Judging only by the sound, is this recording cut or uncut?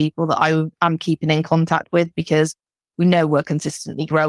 uncut